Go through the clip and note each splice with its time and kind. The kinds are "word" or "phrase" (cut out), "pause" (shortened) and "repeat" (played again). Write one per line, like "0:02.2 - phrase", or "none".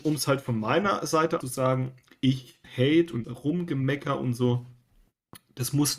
0:01.4 - phrase
0:02.6 - phrase
0:03.2 - word